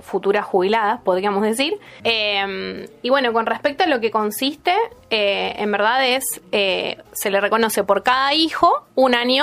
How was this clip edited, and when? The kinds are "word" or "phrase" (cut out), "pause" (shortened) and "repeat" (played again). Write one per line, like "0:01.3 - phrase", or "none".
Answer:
0:02.0 - pause

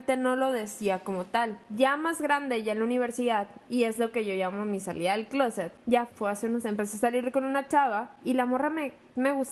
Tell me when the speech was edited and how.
0:03.7 - word
0:06.1 - word
0:06.6 - word

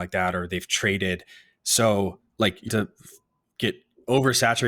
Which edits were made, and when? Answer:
0:02.3 - pause
0:02.7 - word

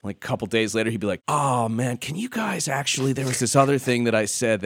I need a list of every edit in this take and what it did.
none

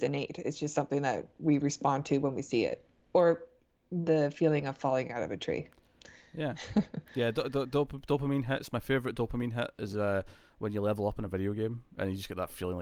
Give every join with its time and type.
0:07.0 - pause

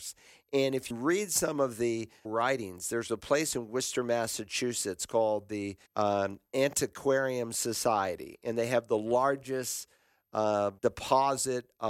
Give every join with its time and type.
0:00.9 - word
0:02.2 - word
0:05.9 - pause
0:10.8 - pause

